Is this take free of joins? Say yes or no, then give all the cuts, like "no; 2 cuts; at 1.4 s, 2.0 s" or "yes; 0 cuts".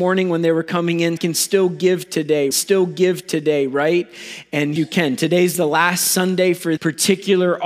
no; 4 cuts; at 1.2 s, 2.5 s, 4.8 s, 6.8 s